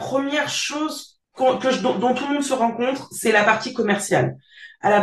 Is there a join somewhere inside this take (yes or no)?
yes